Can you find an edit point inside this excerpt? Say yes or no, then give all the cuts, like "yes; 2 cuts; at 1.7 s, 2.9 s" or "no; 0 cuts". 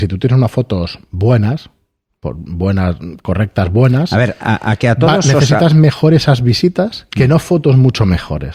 no; 0 cuts